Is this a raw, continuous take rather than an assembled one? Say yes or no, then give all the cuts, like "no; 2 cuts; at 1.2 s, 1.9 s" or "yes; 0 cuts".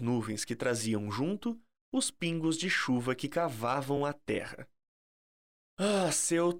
yes; 0 cuts